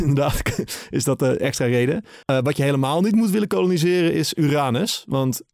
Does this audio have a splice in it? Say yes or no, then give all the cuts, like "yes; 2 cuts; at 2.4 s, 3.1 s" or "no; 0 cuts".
yes; 1 cut; at 2.2 s